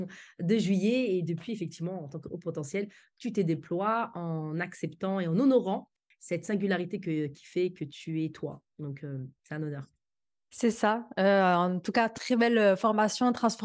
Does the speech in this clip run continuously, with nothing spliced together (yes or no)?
yes